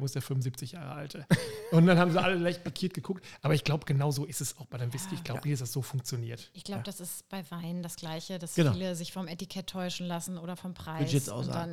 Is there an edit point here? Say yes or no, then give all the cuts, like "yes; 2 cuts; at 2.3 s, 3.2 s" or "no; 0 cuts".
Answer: no; 0 cuts